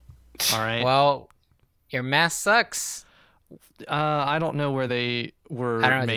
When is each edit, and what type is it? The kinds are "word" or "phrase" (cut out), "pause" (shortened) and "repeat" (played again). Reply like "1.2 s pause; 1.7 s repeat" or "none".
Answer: none